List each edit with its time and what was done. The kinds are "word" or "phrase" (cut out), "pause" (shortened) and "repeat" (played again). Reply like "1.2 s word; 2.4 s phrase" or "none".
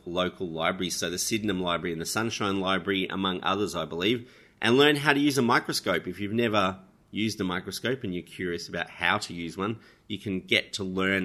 none